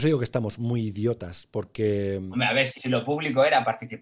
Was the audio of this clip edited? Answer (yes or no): yes